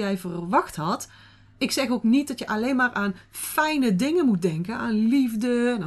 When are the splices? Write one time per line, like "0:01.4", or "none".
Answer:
none